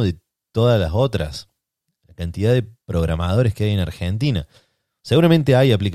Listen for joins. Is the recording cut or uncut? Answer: uncut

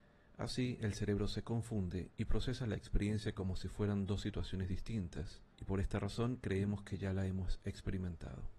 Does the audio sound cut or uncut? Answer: cut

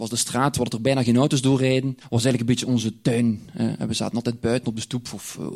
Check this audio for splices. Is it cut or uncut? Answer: cut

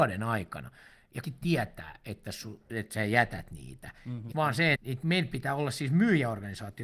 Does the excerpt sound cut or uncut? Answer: cut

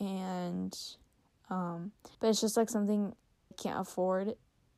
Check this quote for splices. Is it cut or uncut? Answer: cut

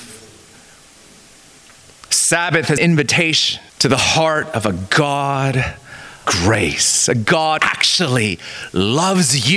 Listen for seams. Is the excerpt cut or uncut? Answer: cut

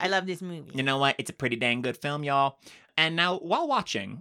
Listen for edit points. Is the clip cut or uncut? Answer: uncut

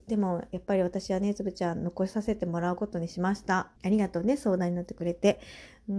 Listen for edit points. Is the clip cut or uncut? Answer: cut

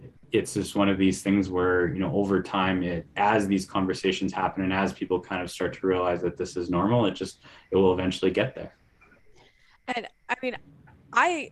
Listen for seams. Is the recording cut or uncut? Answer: uncut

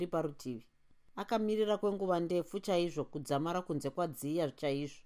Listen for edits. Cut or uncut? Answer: uncut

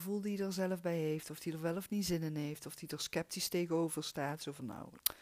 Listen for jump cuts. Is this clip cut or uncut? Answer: uncut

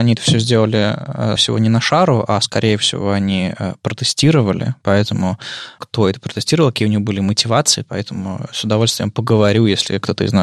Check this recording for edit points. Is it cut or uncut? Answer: cut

